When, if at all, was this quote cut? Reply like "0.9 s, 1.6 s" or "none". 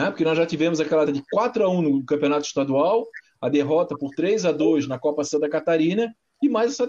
1.1 s